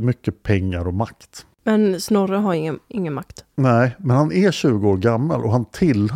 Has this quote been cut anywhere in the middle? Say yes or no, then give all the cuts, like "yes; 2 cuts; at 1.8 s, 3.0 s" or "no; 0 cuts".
no; 0 cuts